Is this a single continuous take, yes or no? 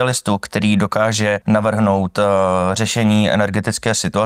no